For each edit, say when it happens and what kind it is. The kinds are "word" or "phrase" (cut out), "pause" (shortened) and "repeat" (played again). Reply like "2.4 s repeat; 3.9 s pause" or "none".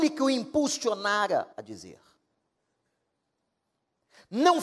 1.5 s pause